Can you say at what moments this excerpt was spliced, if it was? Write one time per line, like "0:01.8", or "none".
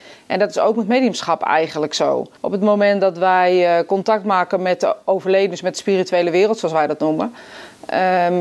0:02.4